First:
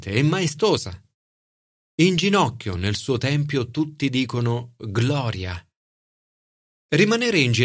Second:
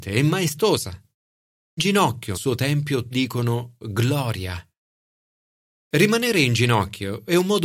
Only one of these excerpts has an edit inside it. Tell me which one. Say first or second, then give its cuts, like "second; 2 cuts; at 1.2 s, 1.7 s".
second; 3 cuts; at 1.8 s, 2.3 s, 3.1 s